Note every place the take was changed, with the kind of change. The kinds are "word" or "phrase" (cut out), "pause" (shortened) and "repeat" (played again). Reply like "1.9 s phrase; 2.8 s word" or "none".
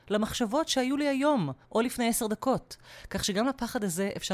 1.6 s pause